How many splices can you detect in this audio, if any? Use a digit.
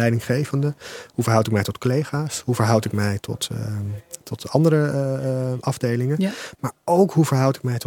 0